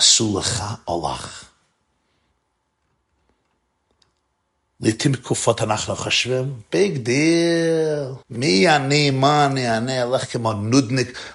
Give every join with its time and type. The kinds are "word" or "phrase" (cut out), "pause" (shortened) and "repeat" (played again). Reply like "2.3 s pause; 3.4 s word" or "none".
8.2 s pause